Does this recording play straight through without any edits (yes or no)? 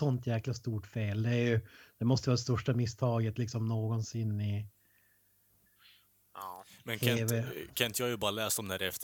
yes